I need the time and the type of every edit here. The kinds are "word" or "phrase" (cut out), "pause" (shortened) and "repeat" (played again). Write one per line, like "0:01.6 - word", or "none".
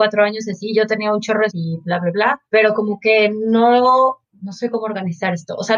0:01.5 - word
0:02.5 - pause
0:04.2 - pause

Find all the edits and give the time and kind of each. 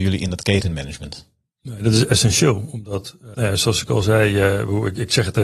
none

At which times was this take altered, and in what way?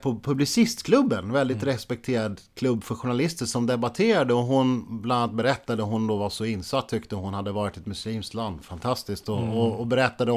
none

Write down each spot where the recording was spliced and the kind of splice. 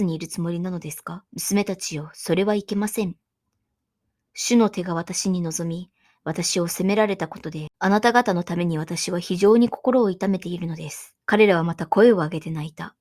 0:01.3 - pause
0:11.2 - pause

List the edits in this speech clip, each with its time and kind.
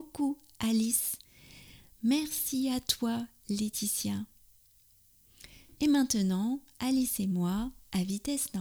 none

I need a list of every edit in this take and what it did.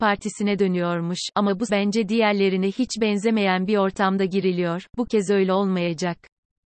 0:01.7 - word

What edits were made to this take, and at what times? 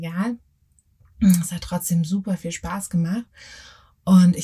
none

